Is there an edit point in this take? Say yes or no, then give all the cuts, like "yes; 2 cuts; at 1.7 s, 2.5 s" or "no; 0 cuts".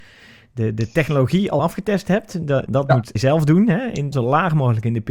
yes; 4 cuts; at 1.6 s, 2.7 s, 3.2 s, 4.1 s